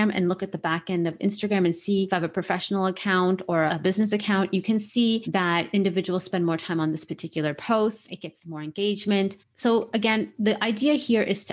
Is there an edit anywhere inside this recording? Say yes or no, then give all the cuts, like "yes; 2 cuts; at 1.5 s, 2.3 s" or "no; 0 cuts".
no; 0 cuts